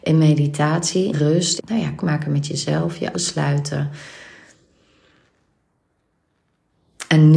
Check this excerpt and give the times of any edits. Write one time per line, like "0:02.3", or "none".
0:01.1
0:01.6
0:02.0
0:03.1

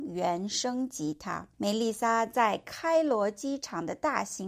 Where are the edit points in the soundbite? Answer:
0:01.5

